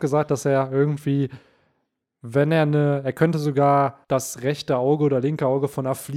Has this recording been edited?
yes; 1 cut; at 4.0 s

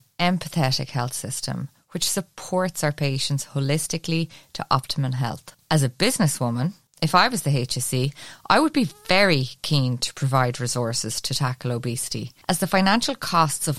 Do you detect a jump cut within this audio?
no; 0 cuts

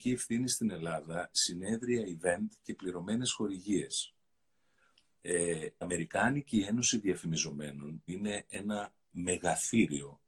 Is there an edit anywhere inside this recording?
yes; 3 cuts; at 1.3 s, 5.8 s, 8.1 s

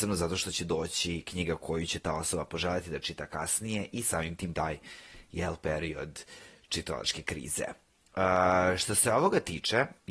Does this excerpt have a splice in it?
yes; 1 cut; at 4.5 s

